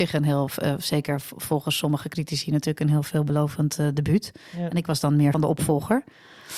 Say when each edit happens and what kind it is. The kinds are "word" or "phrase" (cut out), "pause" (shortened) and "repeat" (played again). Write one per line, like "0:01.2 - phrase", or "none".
0:05.3 - phrase